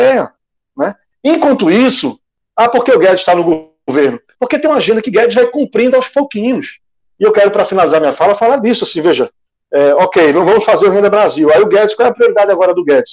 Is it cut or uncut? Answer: uncut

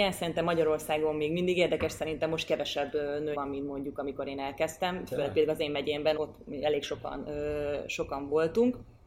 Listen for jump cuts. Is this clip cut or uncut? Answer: cut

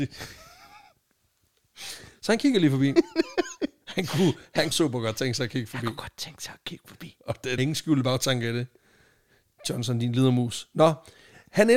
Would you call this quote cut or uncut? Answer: cut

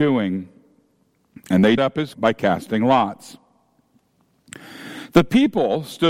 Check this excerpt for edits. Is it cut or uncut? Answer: cut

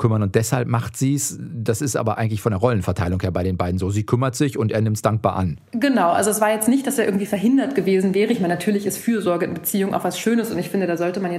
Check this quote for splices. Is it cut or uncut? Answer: cut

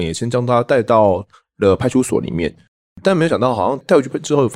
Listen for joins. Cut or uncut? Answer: uncut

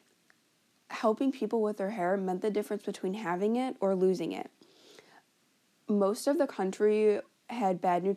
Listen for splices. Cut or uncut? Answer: uncut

